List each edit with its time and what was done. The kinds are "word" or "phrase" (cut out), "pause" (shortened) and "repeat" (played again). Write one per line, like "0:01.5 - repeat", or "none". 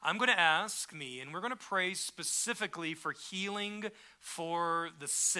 0:00.9 - phrase